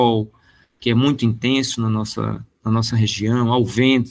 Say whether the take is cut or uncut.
uncut